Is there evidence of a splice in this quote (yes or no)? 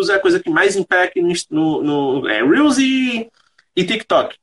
no